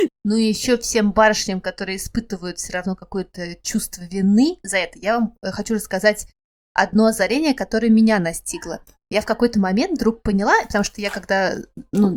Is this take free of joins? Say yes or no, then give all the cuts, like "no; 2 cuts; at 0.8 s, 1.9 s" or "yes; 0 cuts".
yes; 0 cuts